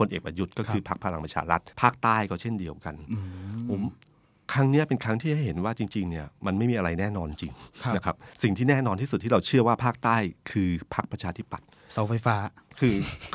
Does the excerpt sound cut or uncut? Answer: cut